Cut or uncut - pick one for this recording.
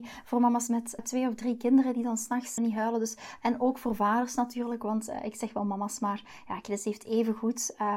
cut